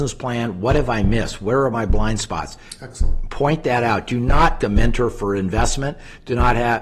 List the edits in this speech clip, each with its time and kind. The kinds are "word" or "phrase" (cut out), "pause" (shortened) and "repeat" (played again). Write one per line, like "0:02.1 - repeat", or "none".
0:04.6 - word